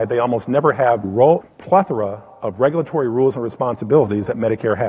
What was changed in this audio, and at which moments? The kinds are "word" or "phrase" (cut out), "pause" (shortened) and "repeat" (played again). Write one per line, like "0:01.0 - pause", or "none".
0:01.0 - word
0:01.4 - word